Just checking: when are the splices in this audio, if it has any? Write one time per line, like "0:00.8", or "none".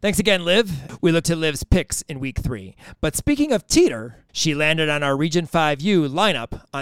0:01.2
0:04.3